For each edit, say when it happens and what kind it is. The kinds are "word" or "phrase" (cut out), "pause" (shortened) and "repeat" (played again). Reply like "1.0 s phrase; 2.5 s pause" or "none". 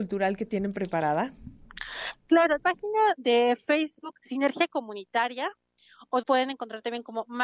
2.6 s word; 4.2 s word; 6.2 s word